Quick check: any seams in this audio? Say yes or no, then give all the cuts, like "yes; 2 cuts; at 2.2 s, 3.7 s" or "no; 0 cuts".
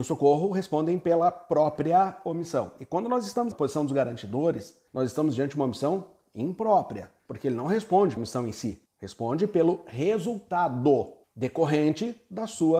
yes; 6 cuts; at 3.5 s, 4.9 s, 7.2 s, 8.2 s, 8.9 s, 11.2 s